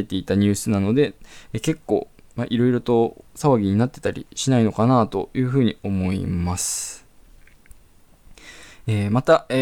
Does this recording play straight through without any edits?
yes; 0 cuts

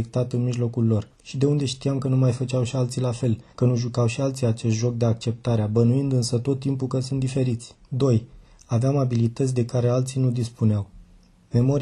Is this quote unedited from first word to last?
no; 3 cuts; at 1.1 s, 3.5 s, 7.8 s

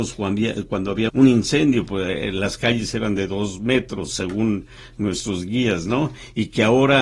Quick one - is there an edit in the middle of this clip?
yes; 1 cut; at 1.1 s

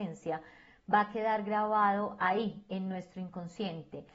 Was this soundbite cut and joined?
no; 0 cuts

